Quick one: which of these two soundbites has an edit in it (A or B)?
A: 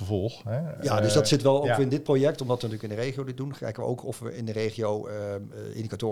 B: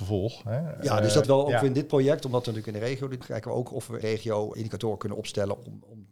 B